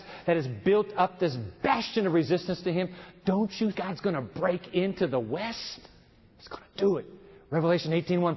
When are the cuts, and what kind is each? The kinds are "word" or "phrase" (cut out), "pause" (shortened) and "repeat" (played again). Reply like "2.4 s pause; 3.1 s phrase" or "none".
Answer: 3.7 s word